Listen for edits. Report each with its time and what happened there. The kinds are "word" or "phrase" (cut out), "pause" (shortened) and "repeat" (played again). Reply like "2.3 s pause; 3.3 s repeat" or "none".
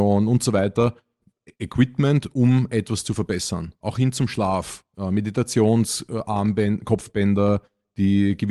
none